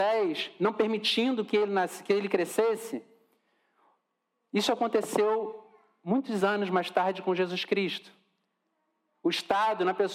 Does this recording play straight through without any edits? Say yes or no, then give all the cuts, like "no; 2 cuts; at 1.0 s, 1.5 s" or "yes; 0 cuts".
yes; 0 cuts